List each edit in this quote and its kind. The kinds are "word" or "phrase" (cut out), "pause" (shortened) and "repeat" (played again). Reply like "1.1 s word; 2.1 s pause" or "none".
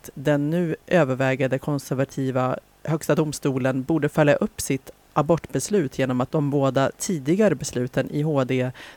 2.7 s word; 6.3 s word